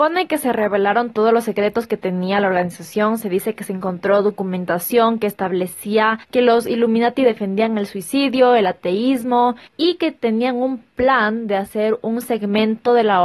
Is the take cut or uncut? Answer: cut